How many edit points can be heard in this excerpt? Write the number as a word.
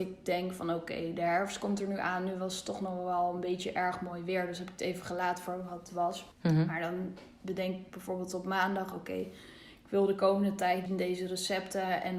two